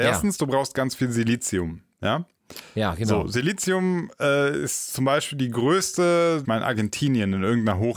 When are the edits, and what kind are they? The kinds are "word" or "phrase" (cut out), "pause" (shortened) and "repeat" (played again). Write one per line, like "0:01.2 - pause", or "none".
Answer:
0:06.4 - phrase